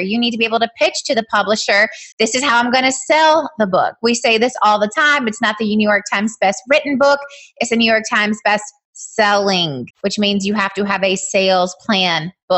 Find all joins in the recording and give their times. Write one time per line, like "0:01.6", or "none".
0:02.1
0:09.9